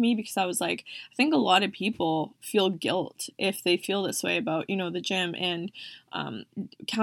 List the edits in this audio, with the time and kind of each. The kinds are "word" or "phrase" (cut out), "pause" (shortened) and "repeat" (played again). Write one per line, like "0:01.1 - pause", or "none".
none